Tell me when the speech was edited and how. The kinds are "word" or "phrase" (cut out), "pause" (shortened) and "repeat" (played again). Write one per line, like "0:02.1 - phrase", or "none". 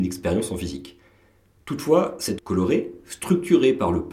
0:02.4 - word